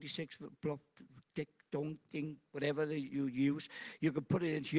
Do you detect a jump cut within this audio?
yes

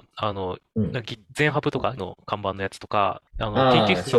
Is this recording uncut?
no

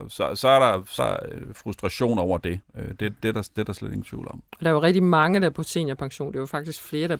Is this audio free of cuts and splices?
no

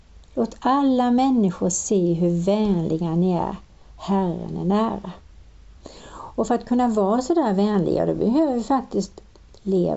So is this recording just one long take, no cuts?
yes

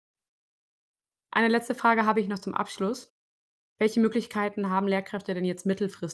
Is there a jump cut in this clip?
no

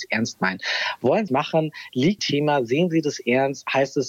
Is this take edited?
yes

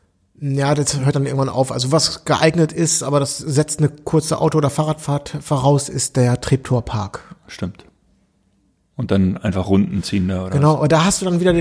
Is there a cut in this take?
no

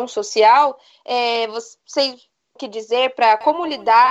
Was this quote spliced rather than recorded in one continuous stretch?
yes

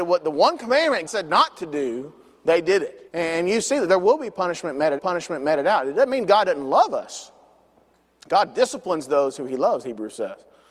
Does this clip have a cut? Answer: yes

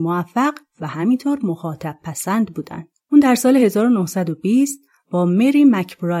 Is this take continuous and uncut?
yes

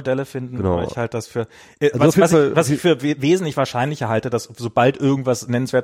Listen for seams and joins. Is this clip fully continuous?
yes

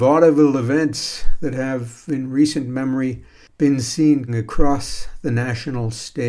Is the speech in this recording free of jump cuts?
no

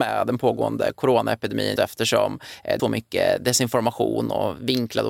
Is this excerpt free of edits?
no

